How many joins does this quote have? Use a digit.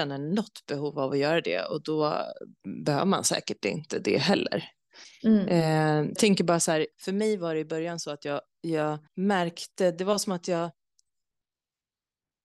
3